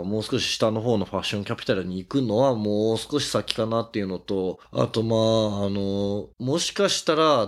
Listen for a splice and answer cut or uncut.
cut